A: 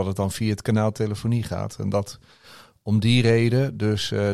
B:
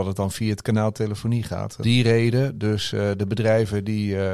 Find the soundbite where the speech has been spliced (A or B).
B